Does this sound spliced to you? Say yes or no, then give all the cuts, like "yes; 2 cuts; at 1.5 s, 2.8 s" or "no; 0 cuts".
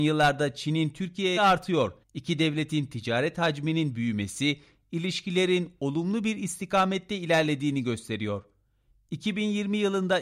yes; 2 cuts; at 1.4 s, 2.0 s